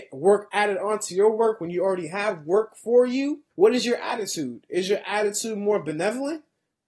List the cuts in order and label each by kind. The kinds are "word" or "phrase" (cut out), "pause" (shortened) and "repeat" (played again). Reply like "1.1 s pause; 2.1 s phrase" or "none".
3.5 s pause